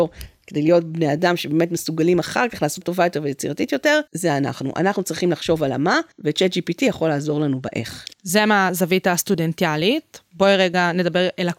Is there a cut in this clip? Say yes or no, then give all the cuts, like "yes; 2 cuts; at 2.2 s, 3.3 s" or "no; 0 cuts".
yes; 4 cuts; at 2.8 s, 4.1 s, 6.1 s, 8.1 s